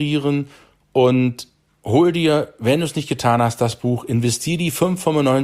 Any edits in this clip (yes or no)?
no